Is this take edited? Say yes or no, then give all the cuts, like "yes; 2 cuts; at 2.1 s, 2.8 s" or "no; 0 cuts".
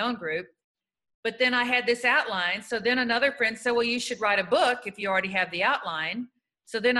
no; 0 cuts